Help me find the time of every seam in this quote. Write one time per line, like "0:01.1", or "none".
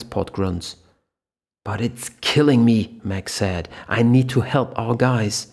none